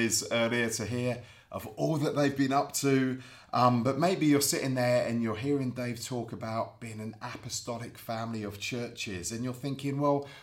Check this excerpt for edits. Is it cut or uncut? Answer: uncut